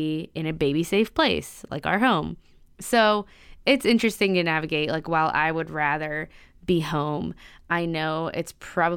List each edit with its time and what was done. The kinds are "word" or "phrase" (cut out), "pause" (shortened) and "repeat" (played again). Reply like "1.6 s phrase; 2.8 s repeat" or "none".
none